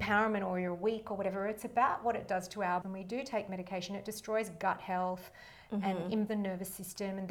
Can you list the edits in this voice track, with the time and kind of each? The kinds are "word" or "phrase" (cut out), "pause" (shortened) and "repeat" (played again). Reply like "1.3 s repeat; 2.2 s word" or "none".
2.8 s word; 6.3 s word